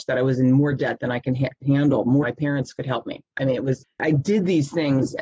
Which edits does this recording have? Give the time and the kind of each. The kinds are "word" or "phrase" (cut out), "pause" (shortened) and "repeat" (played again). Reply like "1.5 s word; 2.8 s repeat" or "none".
1.6 s phrase; 2.2 s word